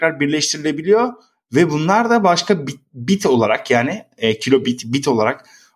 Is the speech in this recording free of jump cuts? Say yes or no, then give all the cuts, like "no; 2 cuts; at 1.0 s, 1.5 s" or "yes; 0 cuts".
yes; 0 cuts